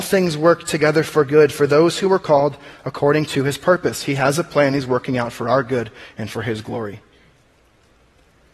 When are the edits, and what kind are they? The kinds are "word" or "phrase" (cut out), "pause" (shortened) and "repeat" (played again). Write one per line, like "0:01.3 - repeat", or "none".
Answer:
none